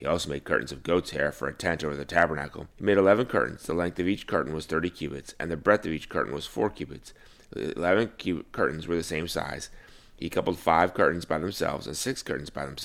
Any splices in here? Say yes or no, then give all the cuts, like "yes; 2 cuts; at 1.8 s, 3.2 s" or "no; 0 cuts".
yes; 1 cut; at 2.7 s